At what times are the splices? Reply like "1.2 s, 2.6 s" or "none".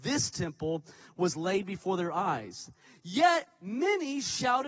none

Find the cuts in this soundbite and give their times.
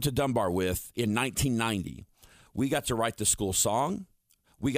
none

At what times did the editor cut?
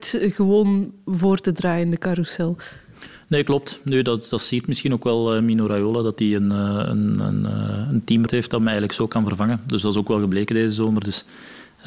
8.3 s

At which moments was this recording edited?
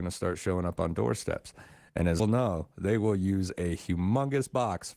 2.2 s

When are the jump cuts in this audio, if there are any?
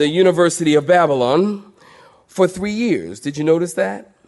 none

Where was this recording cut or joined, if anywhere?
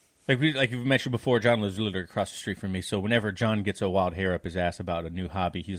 none

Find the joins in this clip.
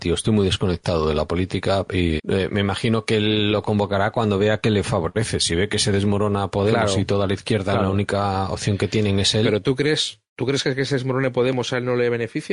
2.2 s

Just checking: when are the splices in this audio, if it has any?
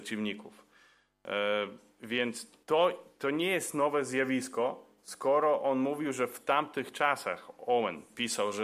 2.6 s

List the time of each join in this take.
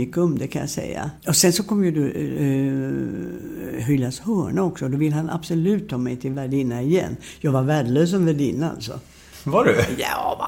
1.2 s

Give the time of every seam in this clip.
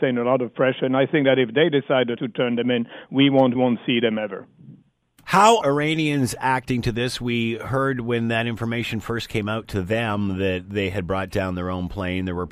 2.2 s, 3.5 s, 5.6 s

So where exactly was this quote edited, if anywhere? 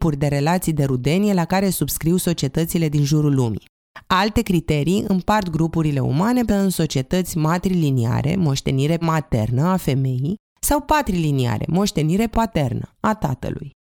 6.5 s, 9.0 s, 10.5 s, 12.3 s

